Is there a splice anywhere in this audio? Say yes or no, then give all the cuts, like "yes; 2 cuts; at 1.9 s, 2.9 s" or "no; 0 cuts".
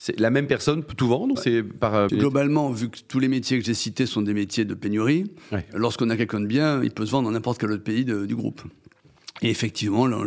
yes; 2 cuts; at 1.4 s, 2.1 s